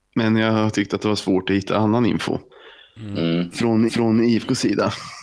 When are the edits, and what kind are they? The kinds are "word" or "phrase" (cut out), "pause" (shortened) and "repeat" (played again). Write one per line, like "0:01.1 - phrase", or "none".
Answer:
0:03.9 - repeat